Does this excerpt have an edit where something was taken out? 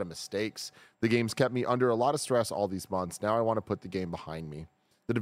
no; 0 cuts

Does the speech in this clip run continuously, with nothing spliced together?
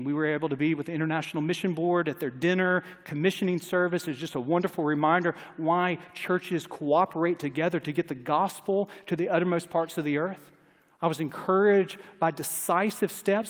yes; 0 cuts

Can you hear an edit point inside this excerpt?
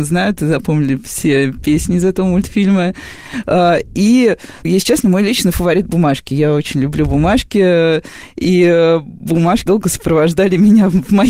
yes; 2 cuts; at 4.6 s, 9.7 s

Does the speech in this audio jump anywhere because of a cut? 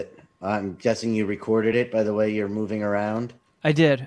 no; 0 cuts

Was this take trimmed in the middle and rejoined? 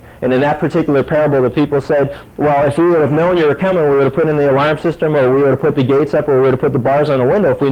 no; 0 cuts

